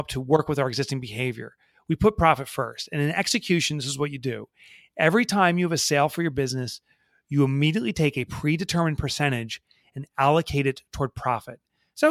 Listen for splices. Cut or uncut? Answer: uncut